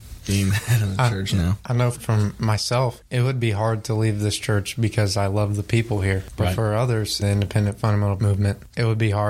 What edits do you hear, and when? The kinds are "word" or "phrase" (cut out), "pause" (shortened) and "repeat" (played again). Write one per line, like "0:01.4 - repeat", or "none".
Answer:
0:01.9 - word
0:07.2 - word
0:08.2 - word